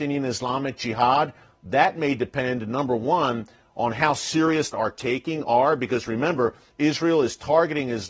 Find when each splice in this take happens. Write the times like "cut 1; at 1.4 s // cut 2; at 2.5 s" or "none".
cut 1; at 4.7 s